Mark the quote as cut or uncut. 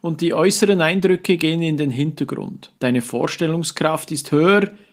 cut